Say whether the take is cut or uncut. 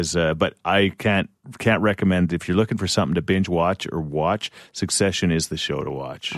uncut